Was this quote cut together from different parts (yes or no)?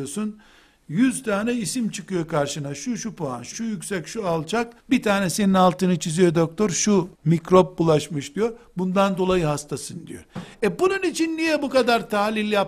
yes